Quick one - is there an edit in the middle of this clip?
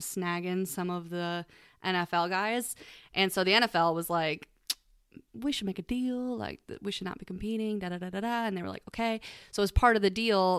no; 0 cuts

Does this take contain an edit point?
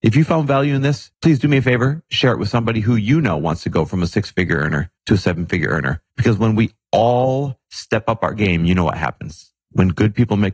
yes; 4 cuts; at 1.1 s, 5.0 s, 6.1 s, 9.6 s

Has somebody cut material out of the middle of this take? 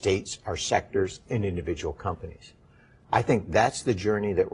no; 0 cuts

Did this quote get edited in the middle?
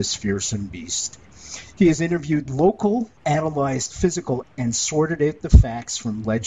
yes; 2 cuts; at 3.2 s, 4.4 s

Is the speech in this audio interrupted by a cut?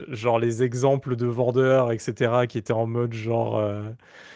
no; 0 cuts

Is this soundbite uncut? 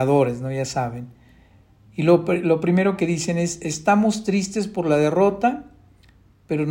yes; 0 cuts

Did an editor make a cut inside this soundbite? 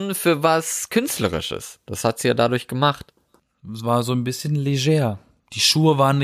no; 0 cuts

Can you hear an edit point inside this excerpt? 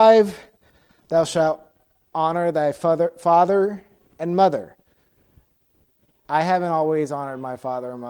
no; 0 cuts

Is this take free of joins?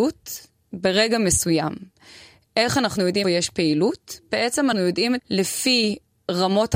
no; 3 cuts; at 3.2 s, 4.7 s, 5.2 s

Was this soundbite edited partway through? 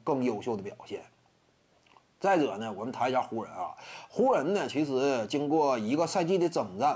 no; 0 cuts

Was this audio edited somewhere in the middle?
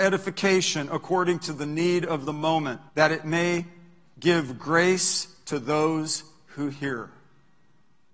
yes; 1 cut; at 2.9 s

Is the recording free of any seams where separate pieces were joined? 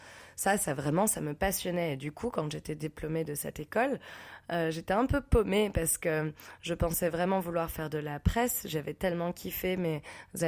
yes; 0 cuts

